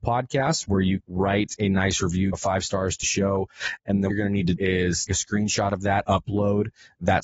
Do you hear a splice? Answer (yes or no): yes